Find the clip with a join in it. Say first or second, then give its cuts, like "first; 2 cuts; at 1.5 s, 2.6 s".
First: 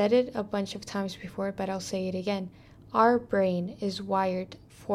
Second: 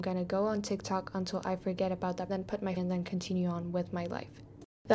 second; 2 cuts; at 2.3 s, 2.8 s